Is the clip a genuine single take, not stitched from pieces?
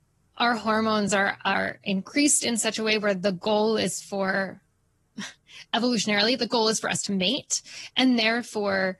yes; 0 cuts

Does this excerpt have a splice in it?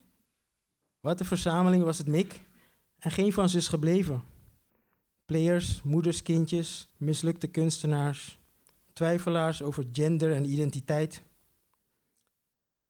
yes; 1 cut; at 6.9 s

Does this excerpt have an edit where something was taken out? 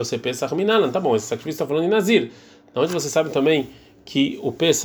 no; 0 cuts

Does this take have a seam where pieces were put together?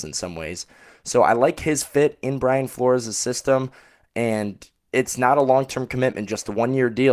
no; 0 cuts

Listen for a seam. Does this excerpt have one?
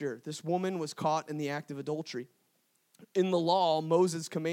no; 0 cuts

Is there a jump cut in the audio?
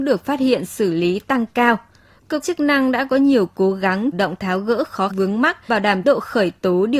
yes; 5 cuts; at 2.4 s, 4.1 s, 5.1 s, 5.7 s, 6.0 s

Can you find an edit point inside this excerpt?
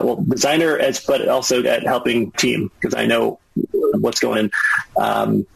yes; 4 cuts; at 1.6 s, 2.3 s, 3.9 s, 4.3 s

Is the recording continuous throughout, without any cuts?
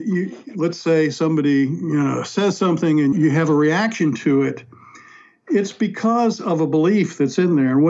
no; 1 cut; at 3.1 s

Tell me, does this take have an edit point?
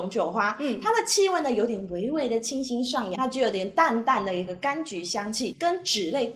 yes; 1 cut; at 3.2 s

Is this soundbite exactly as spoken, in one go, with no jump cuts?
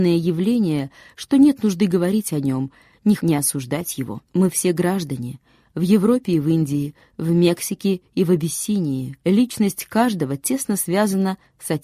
no; 3 cuts; at 3.2 s, 4.3 s, 9.2 s

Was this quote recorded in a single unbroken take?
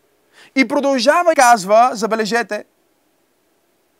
no; 1 cut; at 1.3 s

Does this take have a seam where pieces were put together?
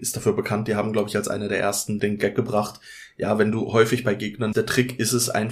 yes; 2 cuts; at 2.0 s, 4.5 s

